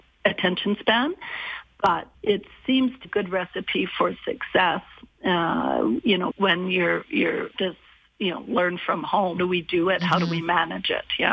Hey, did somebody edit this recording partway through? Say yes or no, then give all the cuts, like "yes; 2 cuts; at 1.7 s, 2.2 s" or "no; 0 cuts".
yes; 5 cuts; at 2.1 s, 3.0 s, 6.3 s, 7.6 s, 9.4 s